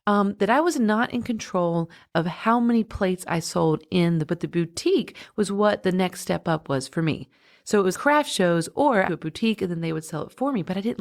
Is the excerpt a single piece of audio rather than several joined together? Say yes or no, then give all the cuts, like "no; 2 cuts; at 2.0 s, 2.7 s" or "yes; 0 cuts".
no; 3 cuts; at 4.3 s, 7.9 s, 9.1 s